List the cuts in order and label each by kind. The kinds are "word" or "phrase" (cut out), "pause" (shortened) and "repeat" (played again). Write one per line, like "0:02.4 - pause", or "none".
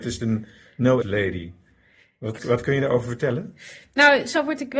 0:01.0 - word
0:02.4 - word